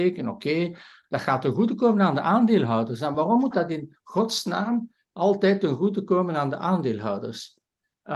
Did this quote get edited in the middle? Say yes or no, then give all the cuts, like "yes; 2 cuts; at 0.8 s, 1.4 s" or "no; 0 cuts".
no; 0 cuts